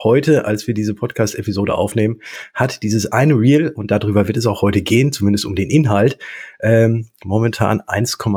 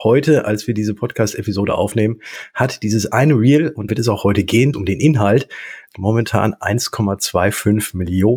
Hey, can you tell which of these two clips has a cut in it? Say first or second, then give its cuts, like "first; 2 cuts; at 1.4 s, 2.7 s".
second; 3 cuts; at 3.9 s, 4.7 s, 5.9 s